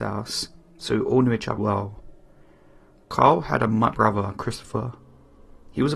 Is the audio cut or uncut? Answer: cut